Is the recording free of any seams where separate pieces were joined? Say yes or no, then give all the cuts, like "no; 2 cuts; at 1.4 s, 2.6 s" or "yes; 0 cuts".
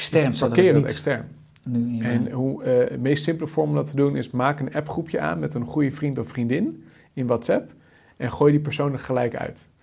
yes; 0 cuts